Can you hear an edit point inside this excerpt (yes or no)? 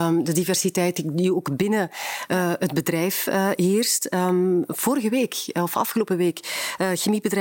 no